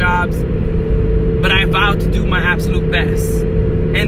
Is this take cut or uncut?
uncut